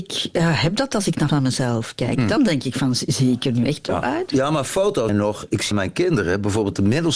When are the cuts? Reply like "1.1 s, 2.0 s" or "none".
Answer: 1.3 s, 2.4 s, 3.9 s, 5.1 s, 5.7 s